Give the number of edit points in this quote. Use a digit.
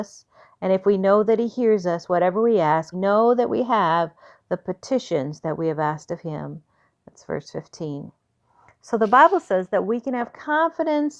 1